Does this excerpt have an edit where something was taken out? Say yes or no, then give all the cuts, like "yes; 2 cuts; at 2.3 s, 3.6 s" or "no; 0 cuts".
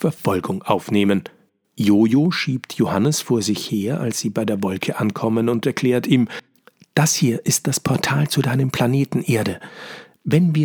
no; 0 cuts